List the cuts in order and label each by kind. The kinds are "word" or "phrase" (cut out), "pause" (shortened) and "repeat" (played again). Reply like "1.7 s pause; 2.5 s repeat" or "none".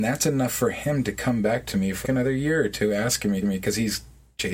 2.0 s word; 3.4 s repeat